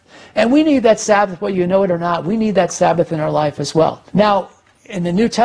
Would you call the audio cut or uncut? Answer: cut